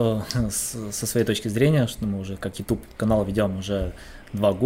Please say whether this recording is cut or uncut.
uncut